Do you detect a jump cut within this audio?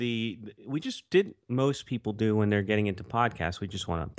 yes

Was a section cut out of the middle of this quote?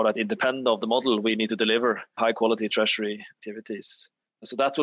no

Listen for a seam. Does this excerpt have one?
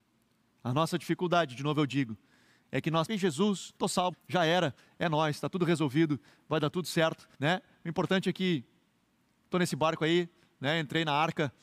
yes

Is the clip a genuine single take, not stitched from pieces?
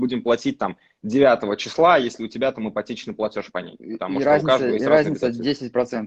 yes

